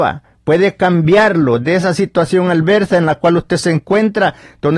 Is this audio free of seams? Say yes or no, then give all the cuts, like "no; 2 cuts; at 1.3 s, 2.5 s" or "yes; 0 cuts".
yes; 0 cuts